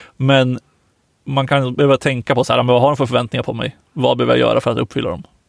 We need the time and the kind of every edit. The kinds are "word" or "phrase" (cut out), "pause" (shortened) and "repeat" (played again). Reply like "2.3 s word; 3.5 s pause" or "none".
none